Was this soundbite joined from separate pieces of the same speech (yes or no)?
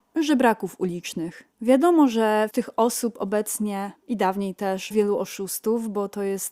yes